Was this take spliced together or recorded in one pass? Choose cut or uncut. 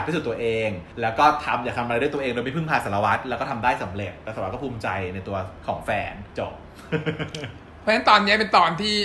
cut